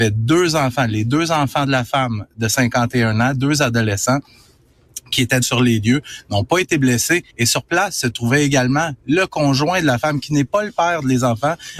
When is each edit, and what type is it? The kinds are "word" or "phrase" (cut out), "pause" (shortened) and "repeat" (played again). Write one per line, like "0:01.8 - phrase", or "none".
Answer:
0:05.4 - word
0:07.3 - pause